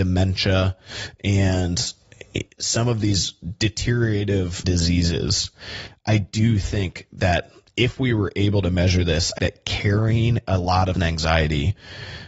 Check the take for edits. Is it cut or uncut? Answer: cut